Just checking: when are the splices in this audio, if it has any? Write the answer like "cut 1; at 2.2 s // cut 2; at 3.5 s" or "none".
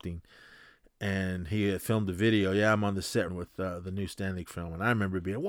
cut 1; at 3.3 s // cut 2; at 4.5 s

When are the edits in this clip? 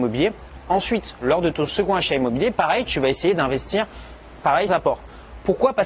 cut 1; at 4.7 s

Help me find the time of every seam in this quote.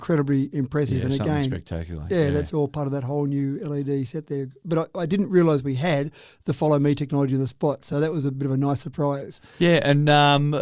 none

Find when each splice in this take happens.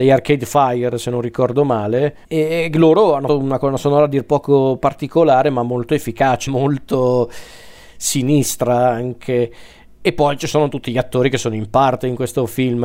cut 1; at 2.2 s // cut 2; at 3.3 s // cut 3; at 6.5 s

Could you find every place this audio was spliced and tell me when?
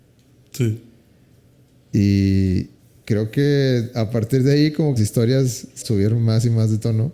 cut 1; at 2.8 s // cut 2; at 5.0 s // cut 3; at 5.8 s

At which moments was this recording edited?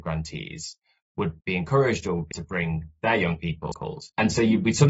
cut 1; at 1.4 s // cut 2; at 2.3 s // cut 3; at 3.7 s

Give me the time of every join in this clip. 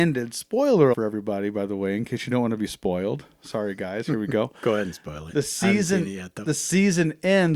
cut 1; at 0.9 s

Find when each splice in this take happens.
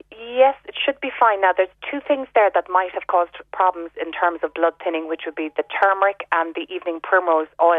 none

